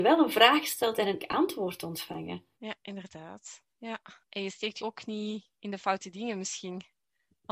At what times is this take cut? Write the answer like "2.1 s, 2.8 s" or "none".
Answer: 1.2 s, 2.5 s, 4.2 s, 4.8 s